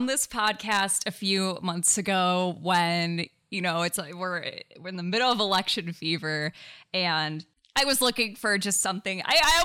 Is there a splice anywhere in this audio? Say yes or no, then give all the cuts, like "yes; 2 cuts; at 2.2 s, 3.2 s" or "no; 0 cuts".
no; 0 cuts